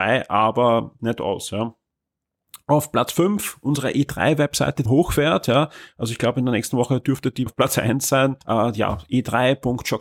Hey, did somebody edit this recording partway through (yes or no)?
yes